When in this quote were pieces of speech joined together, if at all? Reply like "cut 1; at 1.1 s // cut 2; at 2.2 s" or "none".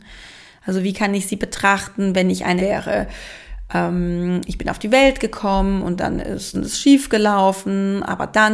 cut 1; at 2.6 s // cut 2; at 6.5 s